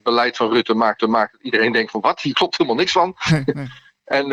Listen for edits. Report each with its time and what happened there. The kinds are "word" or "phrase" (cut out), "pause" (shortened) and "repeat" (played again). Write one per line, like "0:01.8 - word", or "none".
0:01.0 - repeat